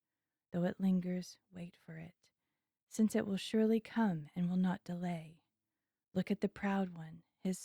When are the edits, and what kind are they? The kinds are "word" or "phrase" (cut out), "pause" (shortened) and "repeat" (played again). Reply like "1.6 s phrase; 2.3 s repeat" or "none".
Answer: none